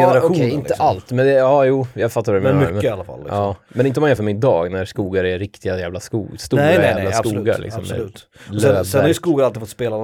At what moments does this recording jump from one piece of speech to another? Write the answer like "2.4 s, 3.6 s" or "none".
none